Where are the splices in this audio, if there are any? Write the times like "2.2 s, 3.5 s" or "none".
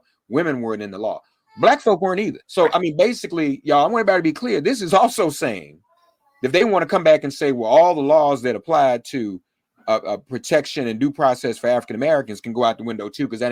2.4 s